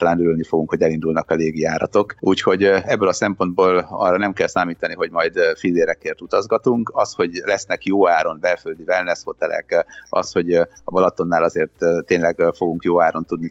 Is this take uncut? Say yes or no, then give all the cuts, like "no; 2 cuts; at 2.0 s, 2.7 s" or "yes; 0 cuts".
yes; 0 cuts